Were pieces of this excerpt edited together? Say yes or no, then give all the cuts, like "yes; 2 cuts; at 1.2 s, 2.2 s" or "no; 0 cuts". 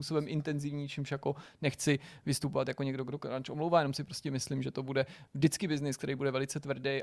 no; 0 cuts